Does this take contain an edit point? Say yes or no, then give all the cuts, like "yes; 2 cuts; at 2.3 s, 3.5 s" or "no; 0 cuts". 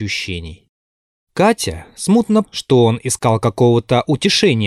yes; 1 cut; at 2.4 s